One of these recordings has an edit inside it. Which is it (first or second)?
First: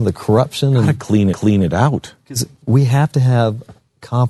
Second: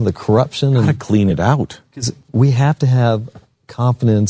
first